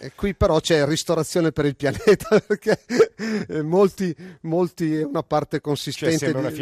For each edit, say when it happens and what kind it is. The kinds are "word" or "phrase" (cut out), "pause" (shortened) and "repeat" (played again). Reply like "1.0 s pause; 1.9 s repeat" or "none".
none